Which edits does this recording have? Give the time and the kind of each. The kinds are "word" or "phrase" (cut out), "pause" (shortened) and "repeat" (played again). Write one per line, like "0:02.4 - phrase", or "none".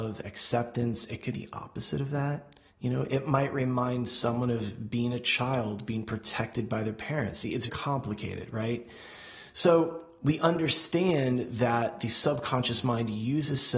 0:01.3 - word
0:02.7 - pause
0:07.7 - word

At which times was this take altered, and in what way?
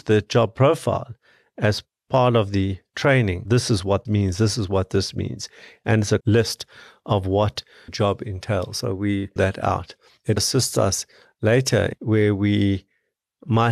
0:03.4 - word
0:04.0 - word
0:06.2 - word
0:07.9 - word
0:09.4 - word
0:10.4 - word

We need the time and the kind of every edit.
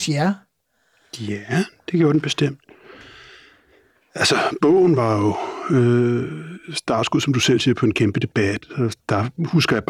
none

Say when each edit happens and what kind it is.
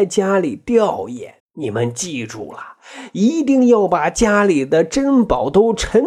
0:01.4 - pause

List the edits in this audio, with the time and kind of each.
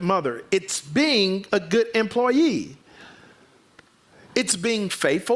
none

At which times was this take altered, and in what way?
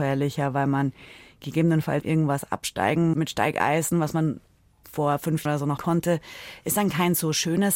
0:02.0 - word
0:03.1 - word
0:05.5 - word
0:05.8 - word

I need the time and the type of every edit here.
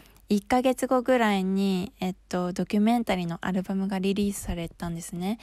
none

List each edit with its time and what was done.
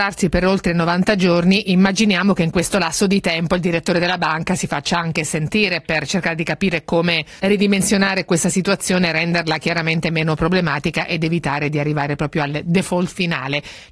0:07.4 - pause

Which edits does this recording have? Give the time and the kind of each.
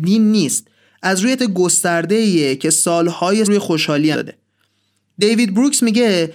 0:01.4 - word
0:03.4 - word
0:04.1 - word

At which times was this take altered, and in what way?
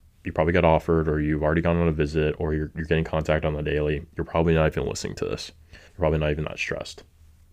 0:05.9 - pause

